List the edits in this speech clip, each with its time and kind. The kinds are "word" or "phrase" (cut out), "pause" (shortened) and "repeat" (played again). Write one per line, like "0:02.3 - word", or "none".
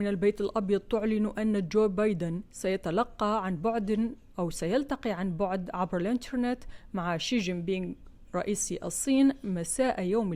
none